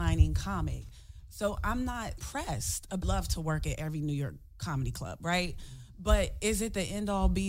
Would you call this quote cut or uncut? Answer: cut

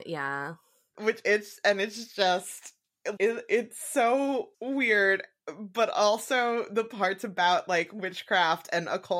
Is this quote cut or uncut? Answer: cut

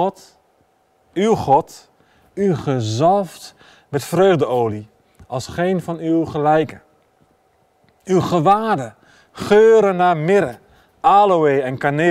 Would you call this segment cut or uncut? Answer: uncut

